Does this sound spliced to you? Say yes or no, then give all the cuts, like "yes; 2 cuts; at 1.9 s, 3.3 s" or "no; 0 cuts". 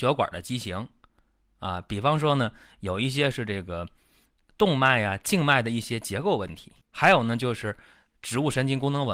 yes; 1 cut; at 6.8 s